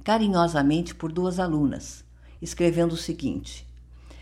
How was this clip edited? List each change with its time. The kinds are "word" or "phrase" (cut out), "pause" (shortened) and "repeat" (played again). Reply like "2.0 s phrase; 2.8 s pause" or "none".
none

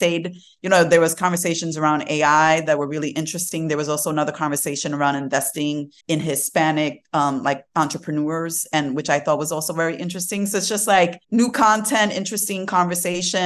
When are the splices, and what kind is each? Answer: 6.0 s pause; 7.7 s pause; 11.2 s pause

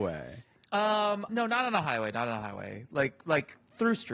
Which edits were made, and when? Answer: 1.3 s word

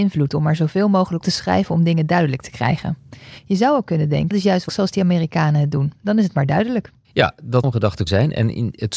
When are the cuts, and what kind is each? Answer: 1.2 s word; 4.3 s word; 4.7 s word; 7.6 s word; 8.1 s word

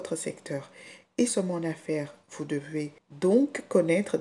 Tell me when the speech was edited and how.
1.3 s phrase

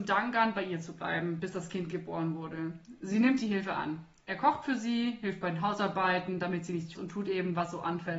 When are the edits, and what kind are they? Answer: 6.9 s phrase

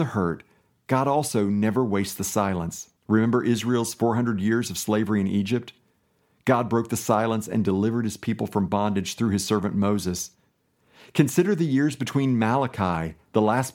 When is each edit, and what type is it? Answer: 3.0 s pause

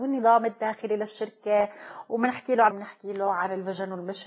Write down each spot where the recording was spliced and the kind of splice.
2.7 s word

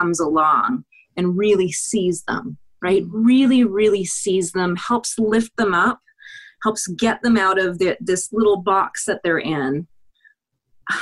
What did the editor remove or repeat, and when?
none

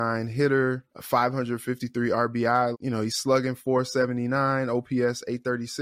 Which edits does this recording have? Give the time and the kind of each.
0.9 s pause; 2.7 s word

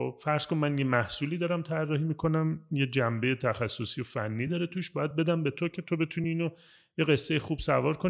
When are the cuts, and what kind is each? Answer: none

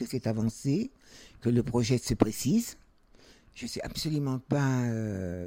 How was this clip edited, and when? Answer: none

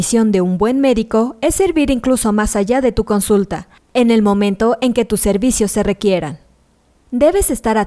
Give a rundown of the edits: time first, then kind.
none

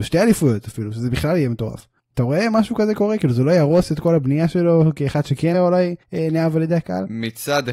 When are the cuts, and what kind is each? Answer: 2.0 s pause; 5.5 s word; 6.0 s pause

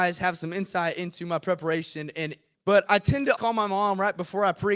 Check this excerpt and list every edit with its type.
2.5 s phrase; 2.9 s word; 3.4 s word

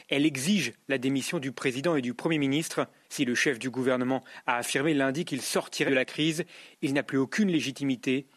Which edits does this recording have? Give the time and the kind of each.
3.0 s pause; 5.9 s phrase

